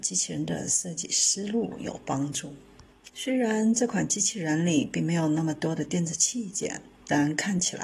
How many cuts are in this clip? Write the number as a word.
one